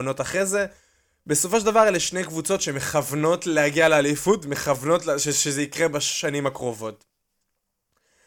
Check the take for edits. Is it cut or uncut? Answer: uncut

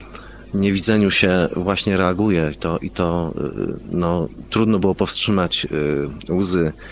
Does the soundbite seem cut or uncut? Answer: uncut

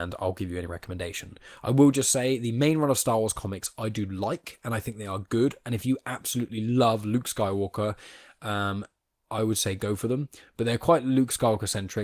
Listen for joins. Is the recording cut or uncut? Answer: uncut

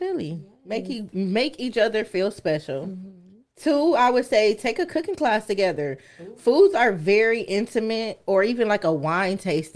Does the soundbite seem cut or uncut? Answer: uncut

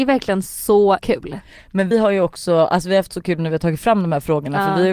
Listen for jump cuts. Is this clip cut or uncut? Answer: cut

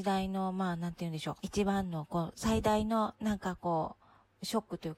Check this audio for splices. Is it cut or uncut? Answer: cut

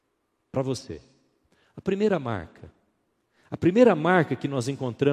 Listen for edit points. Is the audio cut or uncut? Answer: uncut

